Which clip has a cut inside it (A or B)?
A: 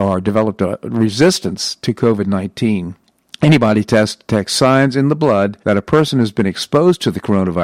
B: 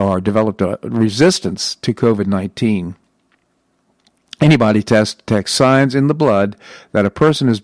A